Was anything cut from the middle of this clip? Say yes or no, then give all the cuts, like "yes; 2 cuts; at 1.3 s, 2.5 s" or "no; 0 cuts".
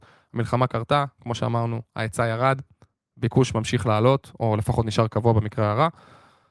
no; 0 cuts